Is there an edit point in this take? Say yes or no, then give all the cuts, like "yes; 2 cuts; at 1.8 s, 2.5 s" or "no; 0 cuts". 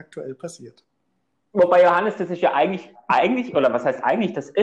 no; 0 cuts